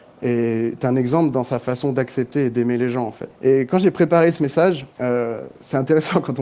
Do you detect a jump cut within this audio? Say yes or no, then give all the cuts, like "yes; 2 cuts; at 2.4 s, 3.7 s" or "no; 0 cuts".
yes; 2 cuts; at 3.3 s, 4.9 s